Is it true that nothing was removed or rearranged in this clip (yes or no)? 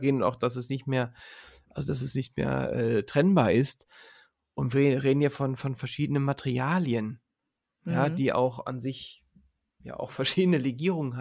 yes